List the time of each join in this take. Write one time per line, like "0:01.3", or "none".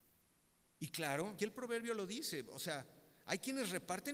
0:01.4